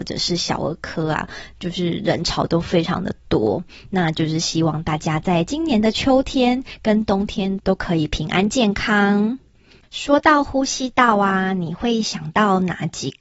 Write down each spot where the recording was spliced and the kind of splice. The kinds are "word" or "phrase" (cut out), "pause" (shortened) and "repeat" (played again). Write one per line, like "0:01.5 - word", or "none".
none